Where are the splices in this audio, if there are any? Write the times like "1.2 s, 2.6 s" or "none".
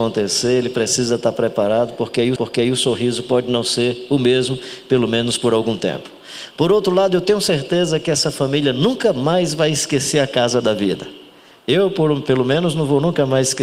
2.4 s